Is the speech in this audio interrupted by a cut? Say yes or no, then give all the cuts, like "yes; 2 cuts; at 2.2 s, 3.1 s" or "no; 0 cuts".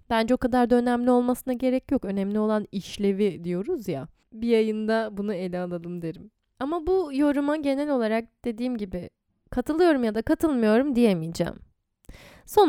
no; 0 cuts